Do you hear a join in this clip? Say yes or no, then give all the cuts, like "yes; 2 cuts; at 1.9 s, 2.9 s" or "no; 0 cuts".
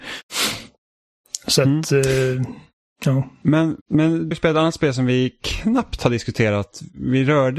yes; 2 cuts; at 3.8 s, 4.3 s